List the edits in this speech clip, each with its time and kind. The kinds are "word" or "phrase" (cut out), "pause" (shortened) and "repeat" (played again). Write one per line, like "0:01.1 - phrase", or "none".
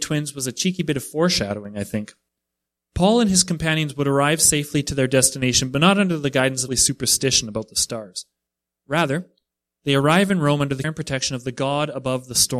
0:06.7 - phrase
0:10.8 - word